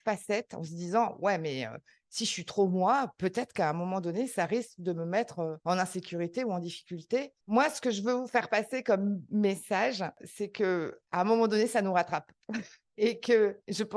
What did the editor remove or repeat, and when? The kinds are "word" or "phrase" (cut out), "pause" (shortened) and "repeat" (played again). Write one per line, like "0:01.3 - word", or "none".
0:07.4 - pause